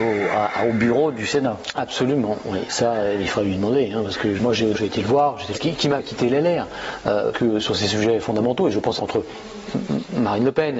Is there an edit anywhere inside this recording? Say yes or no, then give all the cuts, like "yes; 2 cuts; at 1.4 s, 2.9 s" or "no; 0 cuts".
yes; 6 cuts; at 4.4 s, 4.7 s, 5.5 s, 6.0 s, 7.3 s, 9.0 s